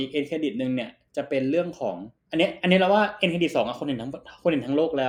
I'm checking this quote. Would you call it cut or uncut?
cut